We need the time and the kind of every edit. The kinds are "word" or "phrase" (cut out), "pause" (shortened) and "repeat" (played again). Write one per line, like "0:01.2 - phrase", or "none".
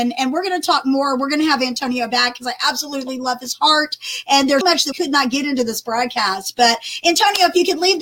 0:04.6 - word
0:04.9 - word